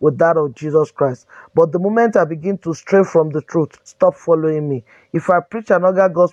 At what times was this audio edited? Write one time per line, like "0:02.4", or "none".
0:03.8